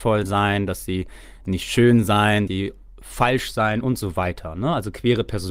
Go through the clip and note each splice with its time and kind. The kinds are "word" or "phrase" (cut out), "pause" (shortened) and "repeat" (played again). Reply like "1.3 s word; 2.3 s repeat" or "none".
2.5 s word

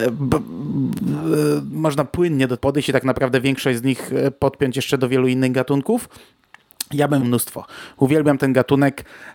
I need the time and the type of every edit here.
2.6 s word; 7.2 s word

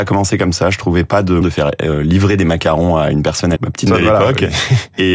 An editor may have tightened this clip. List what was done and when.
1.4 s word; 3.6 s word; 3.9 s word

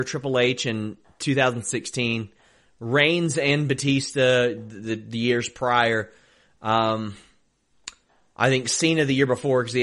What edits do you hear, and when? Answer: none

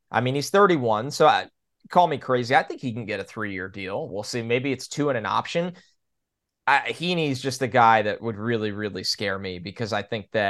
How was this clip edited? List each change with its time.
none

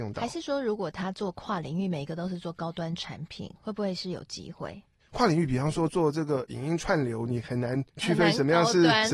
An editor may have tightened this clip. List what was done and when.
5.0 s pause; 7.9 s pause

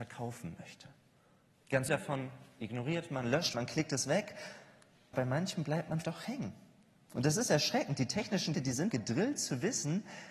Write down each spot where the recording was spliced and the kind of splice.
1.9 s word; 3.5 s word; 5.1 s word; 6.0 s word; 8.5 s word; 8.9 s word

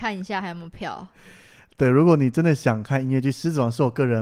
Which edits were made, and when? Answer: none

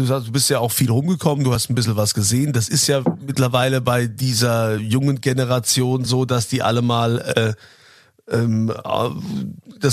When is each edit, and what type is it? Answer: none

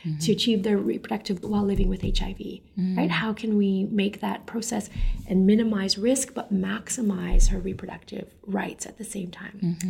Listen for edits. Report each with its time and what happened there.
1.4 s word

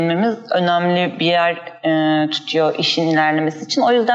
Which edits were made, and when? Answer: none

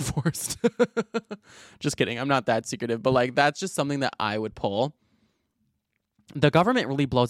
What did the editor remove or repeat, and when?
none

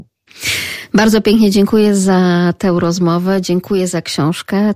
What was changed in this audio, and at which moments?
none

